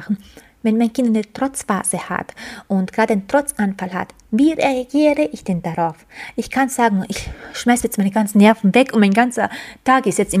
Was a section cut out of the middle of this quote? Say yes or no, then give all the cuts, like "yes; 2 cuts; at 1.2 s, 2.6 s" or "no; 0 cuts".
no; 0 cuts